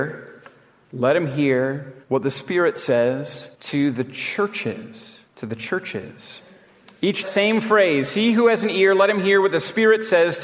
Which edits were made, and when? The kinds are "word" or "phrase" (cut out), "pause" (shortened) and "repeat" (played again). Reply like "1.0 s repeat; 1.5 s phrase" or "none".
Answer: 2.0 s pause; 3.5 s pause; 5.3 s pause; 7.2 s phrase